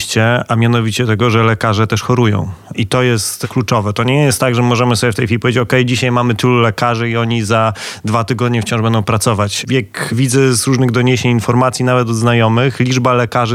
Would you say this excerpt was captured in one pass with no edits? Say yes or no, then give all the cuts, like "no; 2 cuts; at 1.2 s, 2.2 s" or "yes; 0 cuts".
yes; 0 cuts